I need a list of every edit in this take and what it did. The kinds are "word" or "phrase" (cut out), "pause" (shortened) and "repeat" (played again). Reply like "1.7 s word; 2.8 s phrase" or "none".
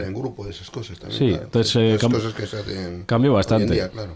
none